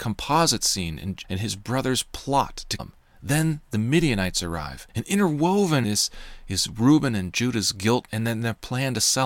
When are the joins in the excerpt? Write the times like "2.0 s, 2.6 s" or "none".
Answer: 1.2 s, 2.8 s, 4.9 s, 5.8 s, 8.1 s